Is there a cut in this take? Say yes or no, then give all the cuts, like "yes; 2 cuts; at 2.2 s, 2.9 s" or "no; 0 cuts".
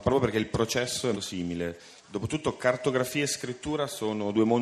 yes; 2 cuts; at 1.1 s, 2.0 s